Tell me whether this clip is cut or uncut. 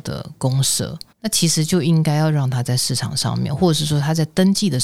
cut